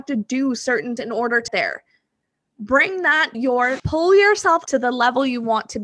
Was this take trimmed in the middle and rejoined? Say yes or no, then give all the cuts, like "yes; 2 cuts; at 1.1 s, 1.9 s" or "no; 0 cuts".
yes; 5 cuts; at 1.0 s, 1.5 s, 3.3 s, 3.8 s, 4.7 s